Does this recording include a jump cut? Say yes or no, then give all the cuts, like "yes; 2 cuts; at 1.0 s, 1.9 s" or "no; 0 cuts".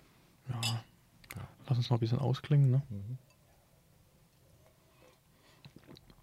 yes; 1 cut; at 1.5 s